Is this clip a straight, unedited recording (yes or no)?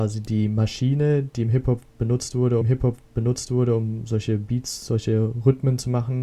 no